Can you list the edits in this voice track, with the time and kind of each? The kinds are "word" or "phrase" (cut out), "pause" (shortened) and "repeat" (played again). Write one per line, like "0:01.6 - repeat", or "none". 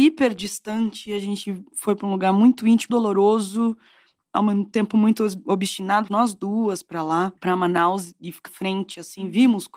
0:02.9 - word
0:06.1 - word
0:07.4 - pause
0:08.5 - word